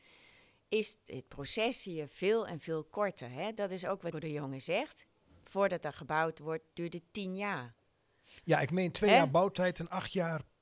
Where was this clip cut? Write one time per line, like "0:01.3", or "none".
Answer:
0:01.1
0:04.1